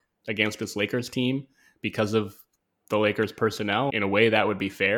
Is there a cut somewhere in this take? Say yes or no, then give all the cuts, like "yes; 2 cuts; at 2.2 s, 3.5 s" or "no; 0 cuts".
yes; 1 cut; at 3.9 s